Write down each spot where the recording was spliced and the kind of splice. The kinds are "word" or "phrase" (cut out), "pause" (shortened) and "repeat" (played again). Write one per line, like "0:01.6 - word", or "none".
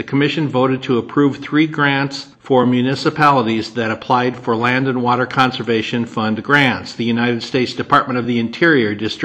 none